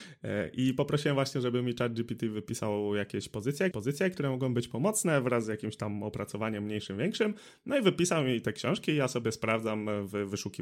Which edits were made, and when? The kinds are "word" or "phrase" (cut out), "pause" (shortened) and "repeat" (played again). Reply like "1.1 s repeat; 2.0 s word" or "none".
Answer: 3.7 s repeat